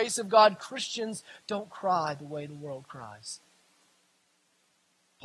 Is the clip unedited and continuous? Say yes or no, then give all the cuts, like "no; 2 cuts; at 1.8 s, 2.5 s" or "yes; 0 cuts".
yes; 0 cuts